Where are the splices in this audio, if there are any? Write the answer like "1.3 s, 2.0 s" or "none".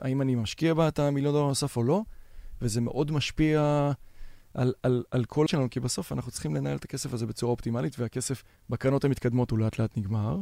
5.5 s, 8.5 s